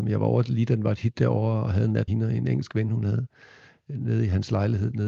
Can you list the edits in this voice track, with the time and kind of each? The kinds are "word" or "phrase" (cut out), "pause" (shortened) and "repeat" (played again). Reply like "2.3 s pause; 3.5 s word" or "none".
2.1 s word